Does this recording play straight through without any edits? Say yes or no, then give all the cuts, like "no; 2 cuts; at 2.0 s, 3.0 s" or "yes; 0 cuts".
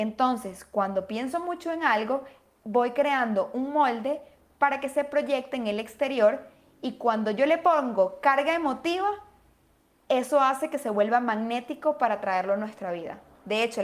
yes; 0 cuts